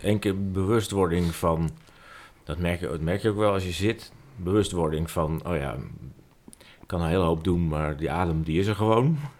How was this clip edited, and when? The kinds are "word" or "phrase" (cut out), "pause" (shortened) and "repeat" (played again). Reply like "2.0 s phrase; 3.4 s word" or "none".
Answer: none